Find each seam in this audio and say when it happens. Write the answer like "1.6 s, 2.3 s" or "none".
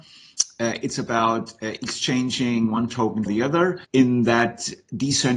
3.3 s, 3.8 s

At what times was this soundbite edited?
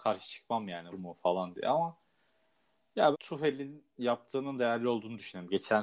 0.9 s, 3.1 s

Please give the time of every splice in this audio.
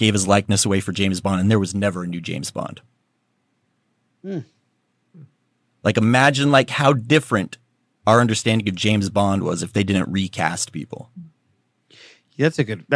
none

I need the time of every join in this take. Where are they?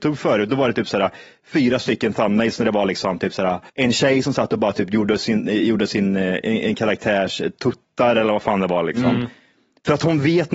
3.7 s

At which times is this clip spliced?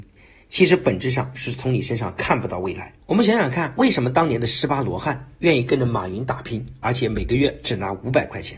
3.0 s

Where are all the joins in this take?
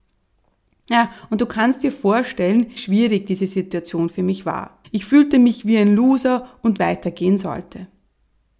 2.8 s, 4.8 s, 6.8 s

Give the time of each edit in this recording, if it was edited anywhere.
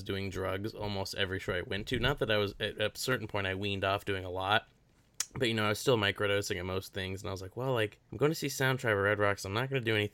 8.0 s

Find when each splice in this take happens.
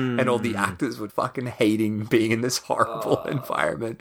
1.1 s

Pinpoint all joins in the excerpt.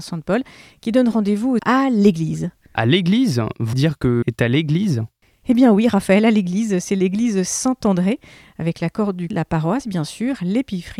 1.6 s, 3.7 s, 4.2 s, 9.3 s

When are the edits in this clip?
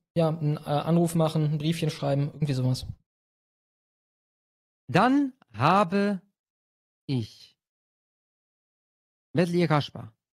none

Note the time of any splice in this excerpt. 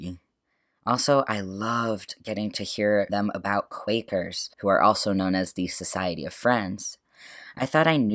3.1 s, 4.5 s

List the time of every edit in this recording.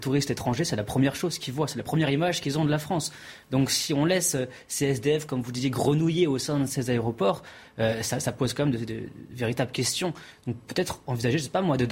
none

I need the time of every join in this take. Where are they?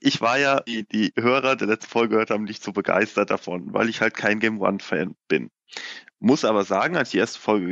5.2 s

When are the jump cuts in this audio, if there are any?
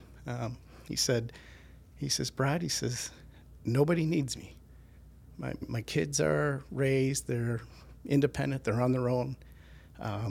5.6 s

